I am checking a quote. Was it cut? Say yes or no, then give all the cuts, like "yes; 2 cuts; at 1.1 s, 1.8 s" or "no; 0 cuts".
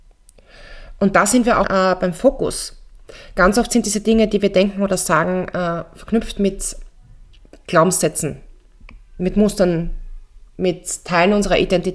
yes; 1 cut; at 1.6 s